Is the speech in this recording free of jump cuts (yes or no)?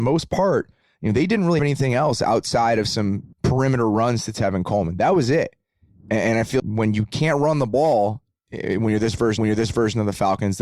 no